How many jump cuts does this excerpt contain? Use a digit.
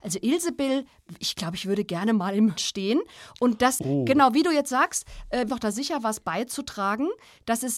3